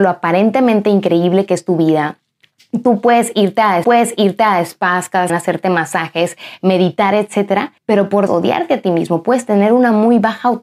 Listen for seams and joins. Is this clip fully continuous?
no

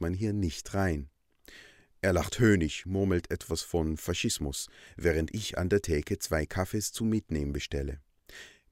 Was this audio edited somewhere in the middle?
no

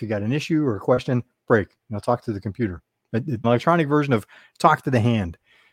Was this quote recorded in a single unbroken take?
no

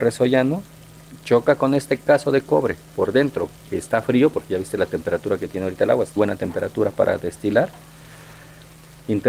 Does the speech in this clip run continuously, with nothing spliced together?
no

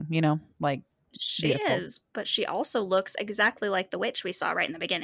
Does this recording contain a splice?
yes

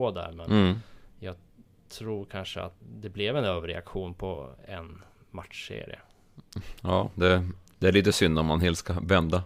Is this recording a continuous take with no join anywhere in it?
no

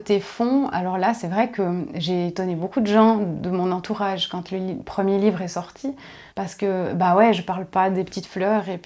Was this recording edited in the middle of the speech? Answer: yes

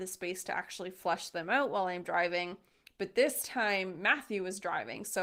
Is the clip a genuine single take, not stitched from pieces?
yes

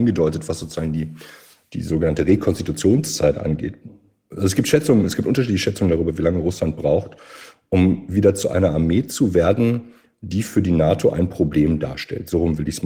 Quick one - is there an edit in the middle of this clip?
no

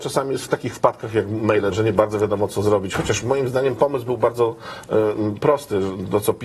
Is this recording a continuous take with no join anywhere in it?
no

